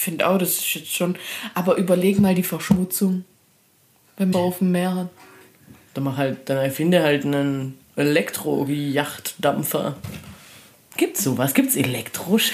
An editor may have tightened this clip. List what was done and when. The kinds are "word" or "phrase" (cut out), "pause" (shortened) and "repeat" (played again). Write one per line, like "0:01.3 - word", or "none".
0:04.3 - phrase